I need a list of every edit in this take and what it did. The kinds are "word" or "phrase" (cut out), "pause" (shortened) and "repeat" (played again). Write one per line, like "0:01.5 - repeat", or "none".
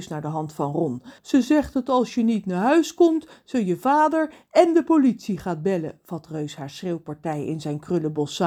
0:01.2 - pause